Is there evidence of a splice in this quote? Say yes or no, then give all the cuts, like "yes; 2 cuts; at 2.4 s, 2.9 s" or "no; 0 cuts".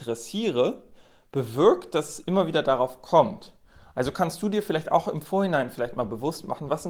no; 0 cuts